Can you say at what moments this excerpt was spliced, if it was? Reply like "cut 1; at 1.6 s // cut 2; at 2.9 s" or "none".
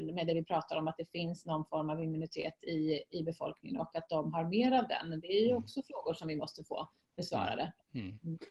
none